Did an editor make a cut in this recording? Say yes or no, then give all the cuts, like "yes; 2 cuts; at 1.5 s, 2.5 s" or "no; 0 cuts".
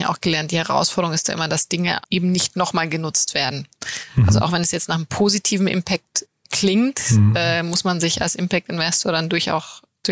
yes; 1 cut; at 2.0 s